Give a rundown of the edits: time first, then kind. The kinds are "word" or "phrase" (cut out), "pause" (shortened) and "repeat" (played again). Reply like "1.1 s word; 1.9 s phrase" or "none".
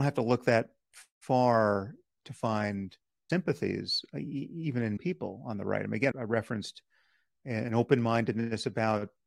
3.3 s word; 5.0 s word; 6.1 s word